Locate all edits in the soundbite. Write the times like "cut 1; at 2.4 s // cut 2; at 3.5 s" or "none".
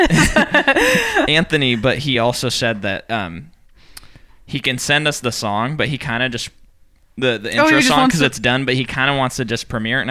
none